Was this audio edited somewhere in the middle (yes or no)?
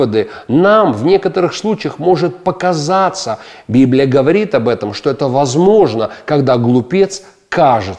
no